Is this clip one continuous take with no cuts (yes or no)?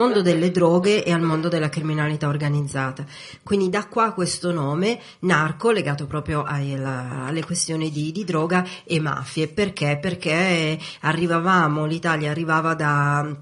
yes